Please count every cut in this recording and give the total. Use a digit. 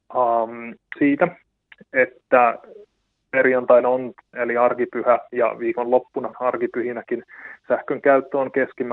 3